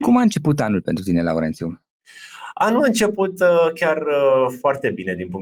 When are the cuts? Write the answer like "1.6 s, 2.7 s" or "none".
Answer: none